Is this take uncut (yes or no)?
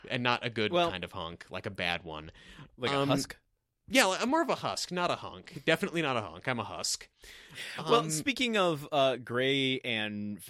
yes